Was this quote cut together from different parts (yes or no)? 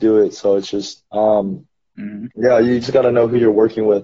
yes